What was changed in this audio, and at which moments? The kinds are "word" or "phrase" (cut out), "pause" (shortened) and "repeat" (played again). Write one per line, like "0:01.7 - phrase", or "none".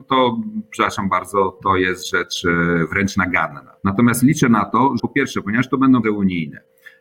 0:03.8 - pause
0:05.0 - word
0:06.0 - word

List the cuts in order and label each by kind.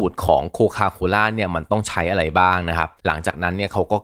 0:03.0 - pause

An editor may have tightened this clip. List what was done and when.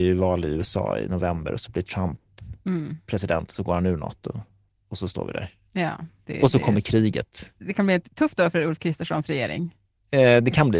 none

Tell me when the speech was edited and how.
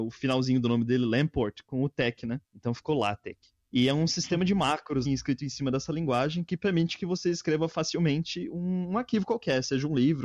0:02.5 - pause
0:05.0 - word

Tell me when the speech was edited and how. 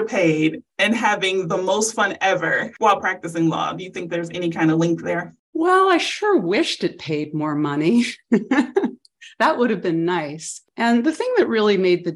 none

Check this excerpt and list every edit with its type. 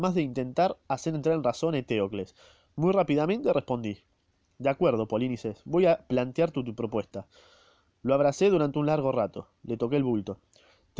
none

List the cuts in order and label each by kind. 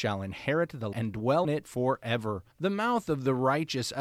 0:00.9 - word
0:01.4 - word
0:02.5 - pause

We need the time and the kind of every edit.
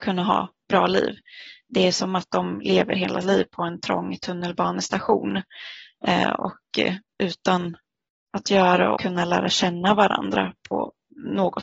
0:03.2 - word
0:08.3 - word
0:09.0 - phrase

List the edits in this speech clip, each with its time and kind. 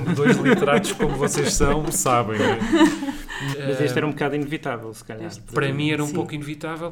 0:03.5 - word

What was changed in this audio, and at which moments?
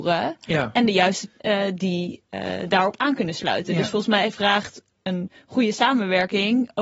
0:01.4 - phrase

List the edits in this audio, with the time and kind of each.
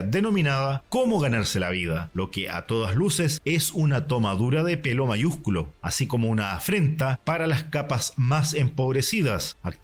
none

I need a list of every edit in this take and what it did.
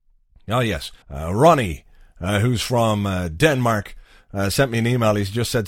0:01.0 - pause

